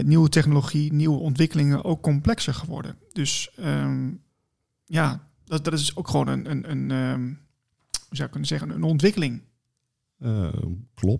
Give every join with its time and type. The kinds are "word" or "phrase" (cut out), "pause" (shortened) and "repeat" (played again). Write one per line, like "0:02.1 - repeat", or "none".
none